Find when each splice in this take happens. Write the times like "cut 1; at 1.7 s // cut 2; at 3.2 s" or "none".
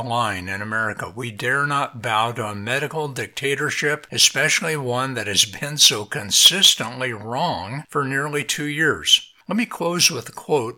cut 1; at 9.4 s